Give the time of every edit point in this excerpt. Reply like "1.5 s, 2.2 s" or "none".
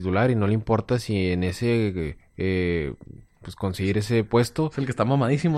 none